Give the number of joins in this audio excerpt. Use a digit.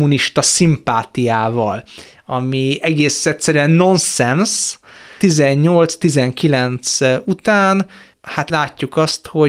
1